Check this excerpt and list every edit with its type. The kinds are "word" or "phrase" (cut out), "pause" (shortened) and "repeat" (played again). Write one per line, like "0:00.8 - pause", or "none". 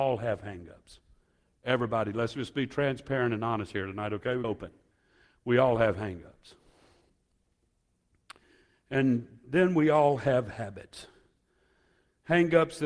0:04.4 - phrase

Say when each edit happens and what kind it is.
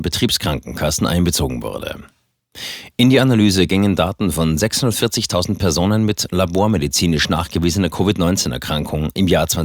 none

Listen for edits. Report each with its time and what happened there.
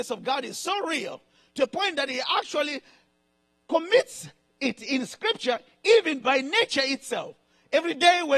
none

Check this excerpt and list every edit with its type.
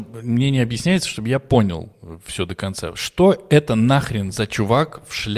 none

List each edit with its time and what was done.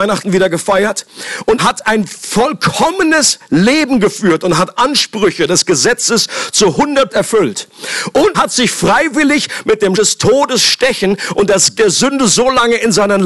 0:01.6 - word
0:04.8 - word
0:07.1 - word
0:08.3 - word
0:09.9 - word
0:11.8 - word

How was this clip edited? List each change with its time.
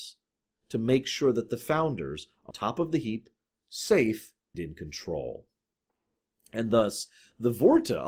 0:02.5 - word
0:04.5 - word

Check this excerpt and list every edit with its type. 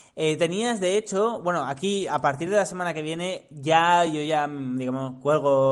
none

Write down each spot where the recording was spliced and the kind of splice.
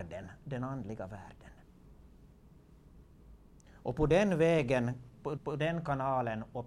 0:05.4 - repeat

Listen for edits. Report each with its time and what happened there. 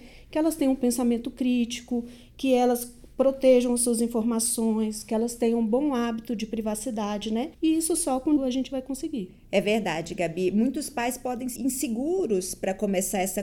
0:07.5 - pause
0:08.4 - word
0:11.6 - word

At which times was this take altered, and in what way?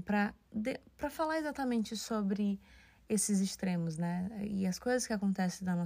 none

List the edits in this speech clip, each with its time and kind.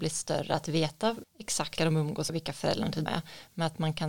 0:01.2 - word
0:01.8 - word
0:02.3 - word
0:03.1 - word

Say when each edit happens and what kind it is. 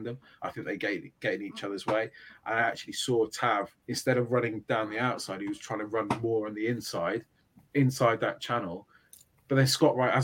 0:03.8 - pause

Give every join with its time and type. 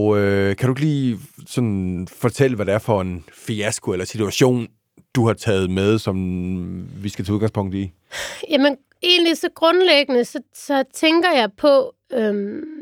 none

